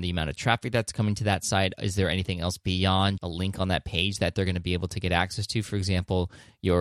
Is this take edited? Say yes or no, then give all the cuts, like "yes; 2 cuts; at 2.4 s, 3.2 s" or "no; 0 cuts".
yes; 1 cut; at 3.2 s